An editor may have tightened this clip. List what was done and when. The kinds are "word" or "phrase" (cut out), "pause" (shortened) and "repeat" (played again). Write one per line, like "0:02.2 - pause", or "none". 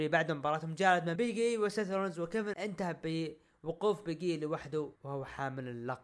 0:01.2 - word
0:02.5 - word
0:05.0 - pause